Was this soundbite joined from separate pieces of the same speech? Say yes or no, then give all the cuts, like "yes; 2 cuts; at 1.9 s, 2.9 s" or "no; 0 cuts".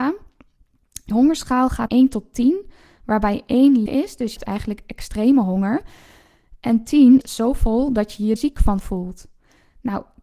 yes; 6 cuts; at 1.1 s, 1.9 s, 3.9 s, 4.4 s, 7.2 s, 8.4 s